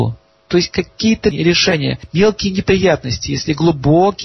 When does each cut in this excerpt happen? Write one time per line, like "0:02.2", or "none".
none